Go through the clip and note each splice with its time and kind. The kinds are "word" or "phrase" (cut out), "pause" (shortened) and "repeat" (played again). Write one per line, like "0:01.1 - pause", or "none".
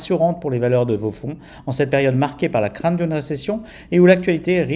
none